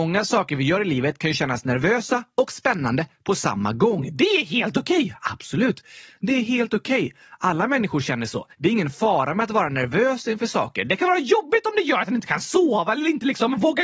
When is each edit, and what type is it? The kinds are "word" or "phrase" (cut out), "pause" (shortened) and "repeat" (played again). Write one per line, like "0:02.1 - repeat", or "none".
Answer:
0:08.5 - pause